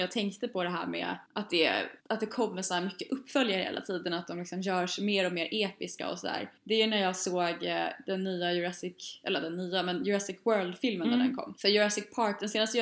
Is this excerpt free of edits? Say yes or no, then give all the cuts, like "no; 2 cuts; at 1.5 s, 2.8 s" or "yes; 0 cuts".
no; 3 cuts; at 1.3 s, 2.0 s, 6.6 s